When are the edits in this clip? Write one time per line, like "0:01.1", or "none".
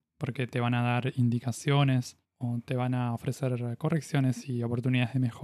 none